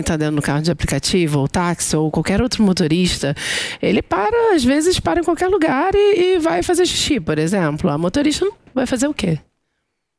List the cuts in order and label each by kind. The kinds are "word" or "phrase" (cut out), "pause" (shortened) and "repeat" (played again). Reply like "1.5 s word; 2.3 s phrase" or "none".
none